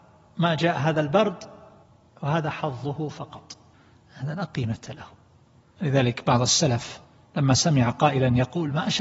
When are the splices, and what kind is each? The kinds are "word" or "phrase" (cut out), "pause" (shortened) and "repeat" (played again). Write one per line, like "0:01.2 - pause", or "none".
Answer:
none